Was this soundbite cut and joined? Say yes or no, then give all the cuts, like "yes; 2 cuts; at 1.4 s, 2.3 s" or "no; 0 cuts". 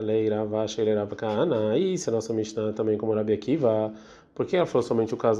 no; 0 cuts